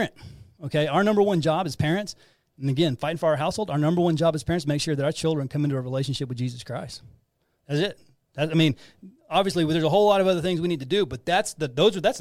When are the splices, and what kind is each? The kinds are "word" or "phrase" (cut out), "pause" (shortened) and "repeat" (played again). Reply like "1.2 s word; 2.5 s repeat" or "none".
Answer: none